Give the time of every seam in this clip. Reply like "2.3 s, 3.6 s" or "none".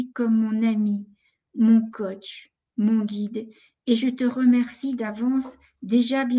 none